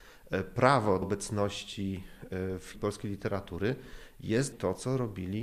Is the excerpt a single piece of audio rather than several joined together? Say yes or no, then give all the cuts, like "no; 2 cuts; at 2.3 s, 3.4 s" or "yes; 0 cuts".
no; 3 cuts; at 1.0 s, 2.7 s, 4.5 s